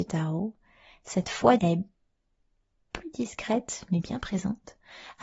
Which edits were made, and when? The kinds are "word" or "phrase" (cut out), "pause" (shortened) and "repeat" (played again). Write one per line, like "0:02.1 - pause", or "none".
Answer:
0:01.6 - word